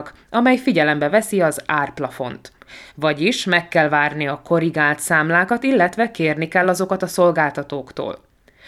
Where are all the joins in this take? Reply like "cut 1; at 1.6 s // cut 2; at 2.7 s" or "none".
none